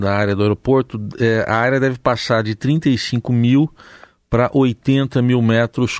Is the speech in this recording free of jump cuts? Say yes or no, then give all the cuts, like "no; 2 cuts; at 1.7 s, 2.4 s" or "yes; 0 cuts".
yes; 0 cuts